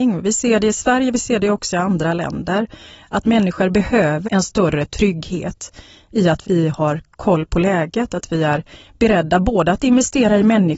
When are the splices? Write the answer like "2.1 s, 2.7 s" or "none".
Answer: 4.2 s, 6.4 s